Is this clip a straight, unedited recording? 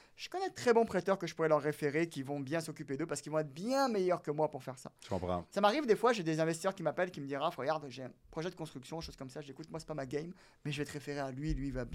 yes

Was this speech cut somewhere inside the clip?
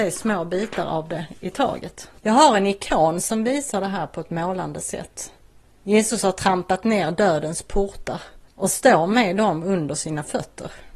yes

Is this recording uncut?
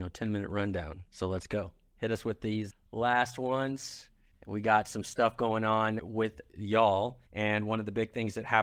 no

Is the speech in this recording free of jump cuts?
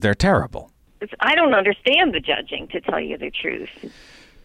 yes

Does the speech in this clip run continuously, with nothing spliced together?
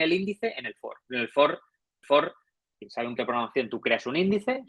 no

